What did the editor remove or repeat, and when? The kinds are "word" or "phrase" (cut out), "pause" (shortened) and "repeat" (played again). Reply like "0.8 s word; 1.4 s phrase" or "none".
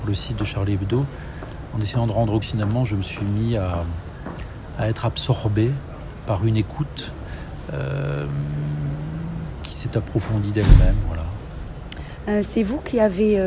2.4 s phrase; 6.2 s word